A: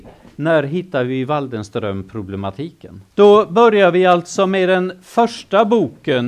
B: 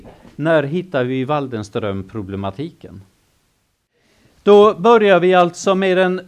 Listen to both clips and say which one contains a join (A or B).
A